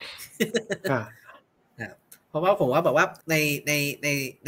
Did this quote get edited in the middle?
yes; 2 cuts; at 2.2 s, 3.2 s

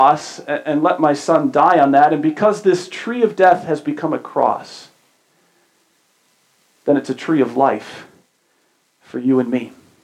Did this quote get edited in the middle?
no; 0 cuts

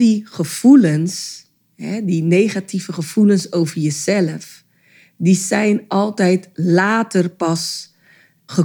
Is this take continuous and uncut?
yes; 0 cuts

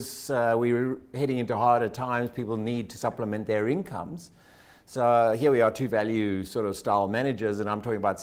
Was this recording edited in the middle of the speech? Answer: no; 0 cuts

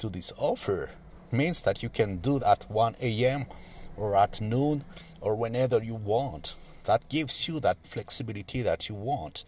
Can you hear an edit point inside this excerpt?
yes; 3 cuts; at 1.3 s, 2.4 s, 7.8 s

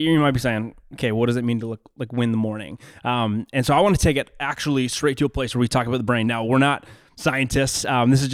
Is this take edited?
no; 0 cuts

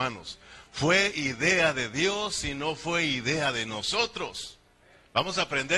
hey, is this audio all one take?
yes; 0 cuts

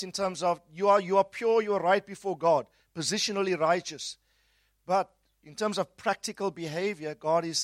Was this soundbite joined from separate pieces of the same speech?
no; 0 cuts

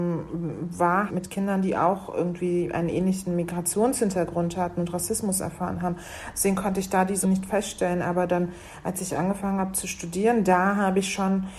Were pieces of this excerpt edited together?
yes; 2 cuts; at 1.1 s, 7.2 s

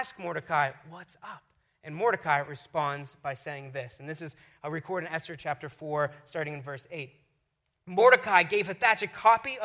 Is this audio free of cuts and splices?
yes; 0 cuts

